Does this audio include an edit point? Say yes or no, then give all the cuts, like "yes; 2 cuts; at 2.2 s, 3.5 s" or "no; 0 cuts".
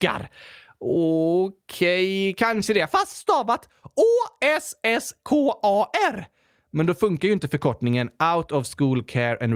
no; 0 cuts